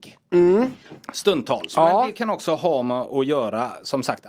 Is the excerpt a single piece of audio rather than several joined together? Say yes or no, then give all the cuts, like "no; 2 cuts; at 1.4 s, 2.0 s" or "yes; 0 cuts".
yes; 0 cuts